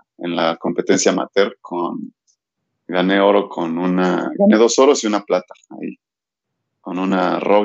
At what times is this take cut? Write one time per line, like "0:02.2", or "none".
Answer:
none